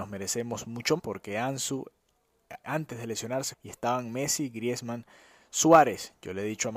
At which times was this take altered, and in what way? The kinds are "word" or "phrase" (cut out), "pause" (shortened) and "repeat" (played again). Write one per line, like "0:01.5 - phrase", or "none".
0:01.0 - word
0:02.6 - word
0:03.5 - word